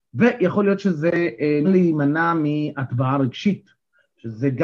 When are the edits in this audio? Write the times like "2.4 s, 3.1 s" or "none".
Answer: 1.6 s